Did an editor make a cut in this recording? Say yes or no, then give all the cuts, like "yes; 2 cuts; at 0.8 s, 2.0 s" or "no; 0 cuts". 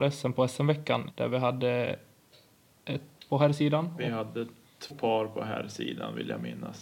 yes; 3 cuts; at 1.1 s, 3.2 s, 4.9 s